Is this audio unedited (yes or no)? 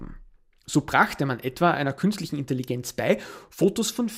yes